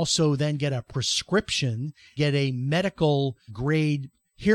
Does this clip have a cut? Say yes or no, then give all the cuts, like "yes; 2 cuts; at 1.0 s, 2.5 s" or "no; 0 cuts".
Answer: yes; 2 cuts; at 2.2 s, 3.5 s